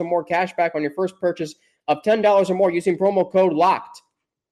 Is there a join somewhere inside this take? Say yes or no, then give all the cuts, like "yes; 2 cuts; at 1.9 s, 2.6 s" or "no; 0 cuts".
no; 0 cuts